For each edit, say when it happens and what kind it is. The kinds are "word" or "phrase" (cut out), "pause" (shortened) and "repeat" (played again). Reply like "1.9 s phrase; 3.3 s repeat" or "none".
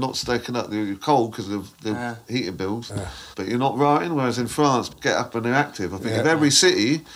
3.3 s pause; 4.9 s word